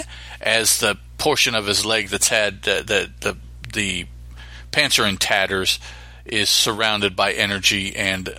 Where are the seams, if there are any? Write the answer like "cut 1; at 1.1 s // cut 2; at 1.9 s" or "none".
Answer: none